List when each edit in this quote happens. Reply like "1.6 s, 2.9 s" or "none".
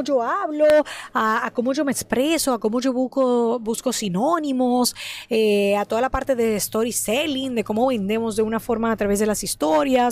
none